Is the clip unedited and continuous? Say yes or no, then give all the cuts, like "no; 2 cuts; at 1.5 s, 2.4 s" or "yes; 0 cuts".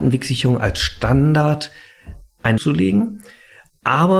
no; 1 cut; at 2.6 s